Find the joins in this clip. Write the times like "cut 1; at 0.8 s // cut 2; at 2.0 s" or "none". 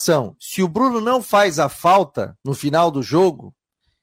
cut 1; at 2.4 s